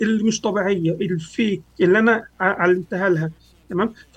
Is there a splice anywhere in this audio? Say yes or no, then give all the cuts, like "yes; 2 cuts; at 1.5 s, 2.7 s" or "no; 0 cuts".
no; 0 cuts